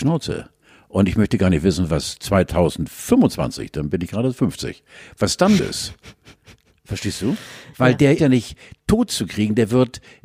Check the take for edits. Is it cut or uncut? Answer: cut